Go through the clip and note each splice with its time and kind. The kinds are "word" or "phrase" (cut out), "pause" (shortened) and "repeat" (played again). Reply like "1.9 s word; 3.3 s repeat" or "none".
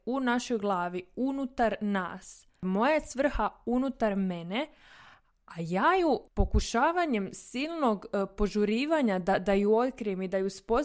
none